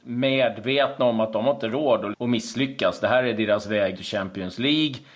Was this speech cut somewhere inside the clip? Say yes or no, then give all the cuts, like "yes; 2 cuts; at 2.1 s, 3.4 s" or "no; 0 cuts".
yes; 2 cuts; at 2.1 s, 3.9 s